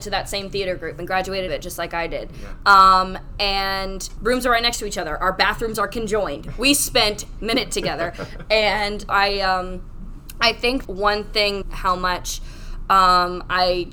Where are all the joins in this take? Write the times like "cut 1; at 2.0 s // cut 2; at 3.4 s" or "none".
cut 1; at 1.5 s // cut 2; at 4.2 s // cut 3; at 7.4 s // cut 4; at 9.1 s // cut 5; at 10.8 s // cut 6; at 11.6 s